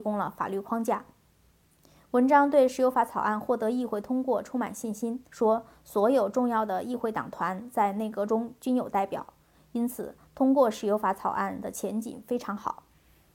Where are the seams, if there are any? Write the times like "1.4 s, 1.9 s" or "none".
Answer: 5.3 s

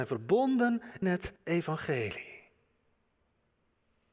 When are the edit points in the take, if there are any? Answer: 1.0 s, 1.4 s

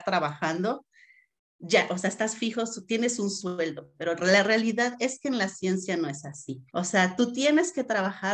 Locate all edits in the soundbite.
6.7 s

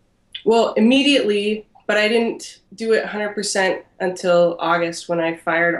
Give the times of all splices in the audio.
2.7 s

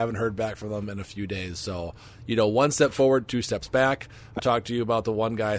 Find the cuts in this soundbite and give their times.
4.4 s

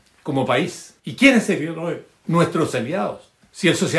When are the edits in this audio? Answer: 1.0 s

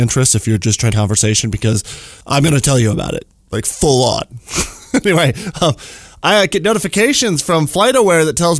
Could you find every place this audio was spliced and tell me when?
0.9 s, 2.2 s

